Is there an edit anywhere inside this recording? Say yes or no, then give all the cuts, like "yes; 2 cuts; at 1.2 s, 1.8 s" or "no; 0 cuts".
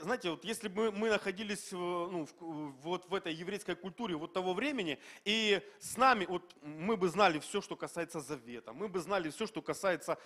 no; 0 cuts